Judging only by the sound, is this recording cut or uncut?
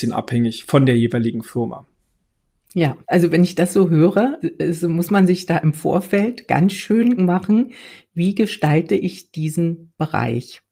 cut